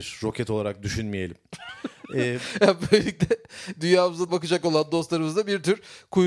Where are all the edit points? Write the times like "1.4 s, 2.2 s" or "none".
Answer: 4.3 s